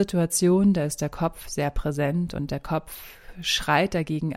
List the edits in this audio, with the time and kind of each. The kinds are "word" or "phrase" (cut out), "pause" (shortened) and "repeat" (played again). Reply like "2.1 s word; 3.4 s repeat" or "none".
none